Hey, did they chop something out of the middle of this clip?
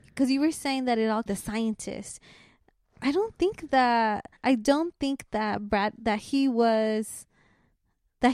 yes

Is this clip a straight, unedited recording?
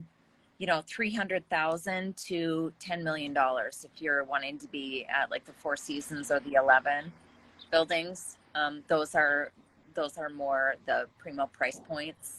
yes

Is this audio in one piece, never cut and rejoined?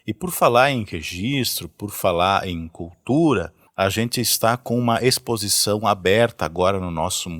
yes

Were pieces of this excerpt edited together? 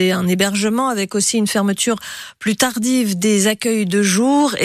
no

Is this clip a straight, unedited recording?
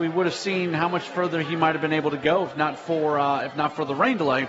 yes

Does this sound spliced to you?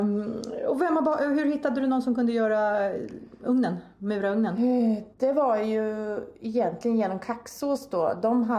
yes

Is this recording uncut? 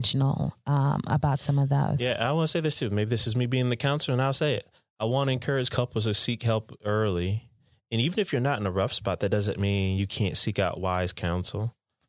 yes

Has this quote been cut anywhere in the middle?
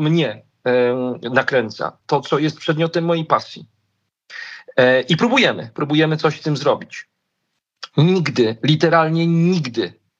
no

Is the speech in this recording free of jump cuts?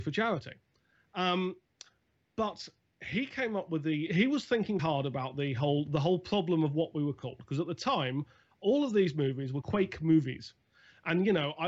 no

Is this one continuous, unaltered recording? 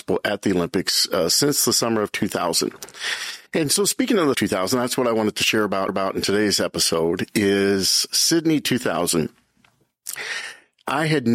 no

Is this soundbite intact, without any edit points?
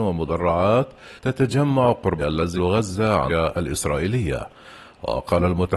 no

